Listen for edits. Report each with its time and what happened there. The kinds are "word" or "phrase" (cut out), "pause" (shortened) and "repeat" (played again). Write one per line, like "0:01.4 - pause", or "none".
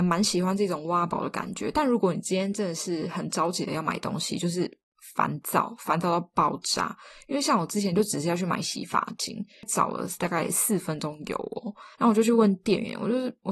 0:11.9 - pause